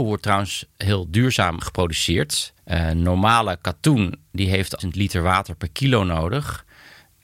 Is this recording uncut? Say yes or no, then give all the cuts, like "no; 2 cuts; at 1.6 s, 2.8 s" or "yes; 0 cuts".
no; 3 cuts; at 1.6 s, 2.6 s, 4.8 s